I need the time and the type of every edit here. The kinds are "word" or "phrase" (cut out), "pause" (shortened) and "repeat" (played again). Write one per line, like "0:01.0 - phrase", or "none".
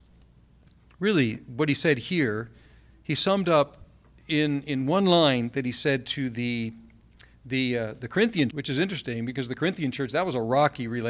0:08.5 - word

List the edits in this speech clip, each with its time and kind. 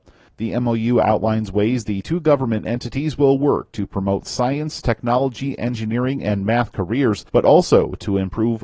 0:07.3 - pause

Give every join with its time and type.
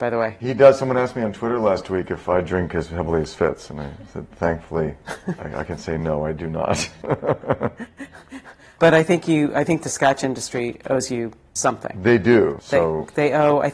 none

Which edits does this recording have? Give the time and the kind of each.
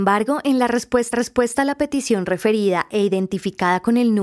0:01.1 - repeat

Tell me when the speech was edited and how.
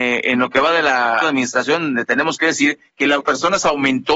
0:01.2 - word
0:02.9 - pause
0:03.2 - word

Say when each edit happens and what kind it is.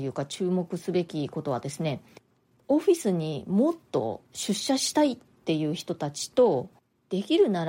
0:04.3 - pause

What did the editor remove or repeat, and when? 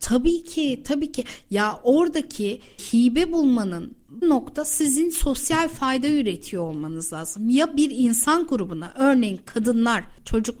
0:04.2 - word

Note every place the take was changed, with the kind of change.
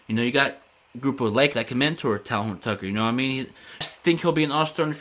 0:01.5 - word
0:03.8 - phrase

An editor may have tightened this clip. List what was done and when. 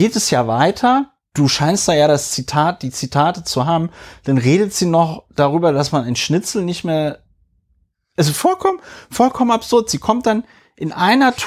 none

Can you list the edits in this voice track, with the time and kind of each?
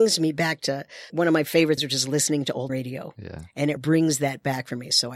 0:01.1 - word
0:01.8 - word
0:02.7 - word
0:03.8 - word

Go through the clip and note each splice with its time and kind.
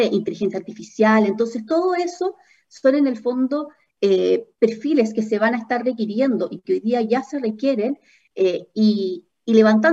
none

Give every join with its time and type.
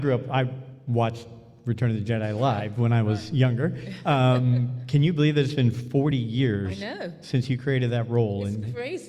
none

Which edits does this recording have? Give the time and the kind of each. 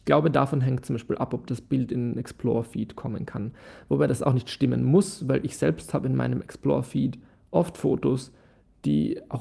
none

